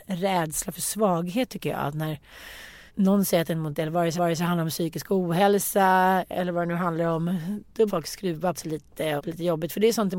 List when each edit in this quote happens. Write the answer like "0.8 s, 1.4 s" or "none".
2.9 s, 3.7 s, 4.2 s, 7.9 s, 8.5 s, 9.2 s